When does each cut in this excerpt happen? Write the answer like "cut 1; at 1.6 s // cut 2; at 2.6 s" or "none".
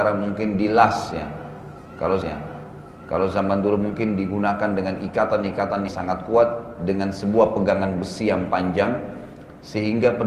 cut 1; at 2.2 s // cut 2; at 5.9 s

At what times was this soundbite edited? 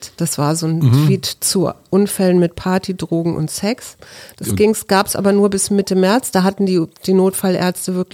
none

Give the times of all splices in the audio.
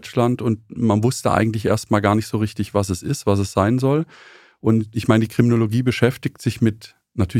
none

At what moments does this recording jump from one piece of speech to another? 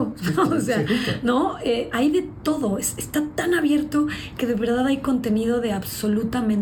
none

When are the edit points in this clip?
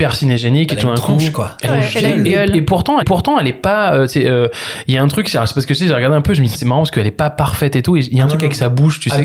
cut 1; at 1.7 s // cut 2; at 3.0 s // cut 3; at 6.5 s

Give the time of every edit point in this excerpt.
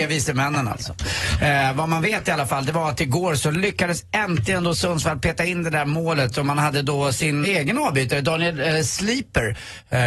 cut 1; at 7.4 s

